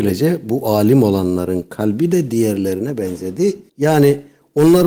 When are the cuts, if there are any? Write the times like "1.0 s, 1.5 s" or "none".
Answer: 3.7 s